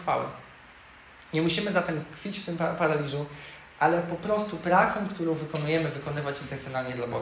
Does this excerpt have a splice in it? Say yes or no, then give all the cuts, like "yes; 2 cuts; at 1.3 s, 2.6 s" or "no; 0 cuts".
no; 0 cuts